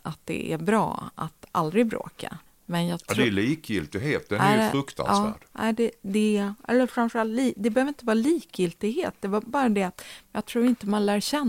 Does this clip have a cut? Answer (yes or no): yes